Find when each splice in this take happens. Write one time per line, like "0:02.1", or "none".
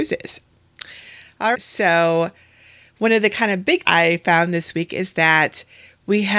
0:01.5
0:03.9

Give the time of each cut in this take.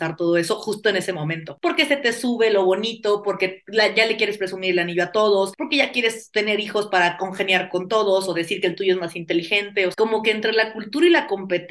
none

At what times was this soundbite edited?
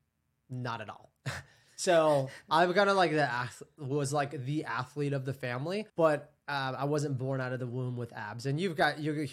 0:05.9

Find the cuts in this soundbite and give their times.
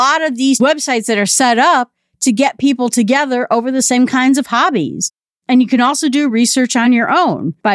none

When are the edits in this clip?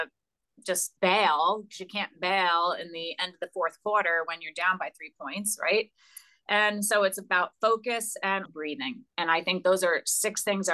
0:01.0
0:08.5
0:09.1

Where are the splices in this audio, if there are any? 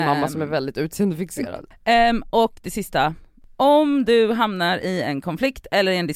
none

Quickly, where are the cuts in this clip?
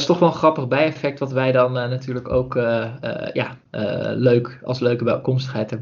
none

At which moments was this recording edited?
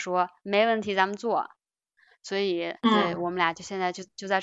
0:02.8

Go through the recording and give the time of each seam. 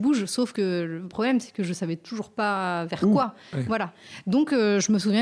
none

